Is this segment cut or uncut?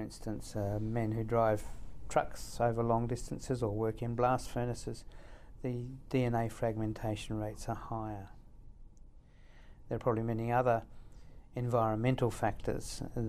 uncut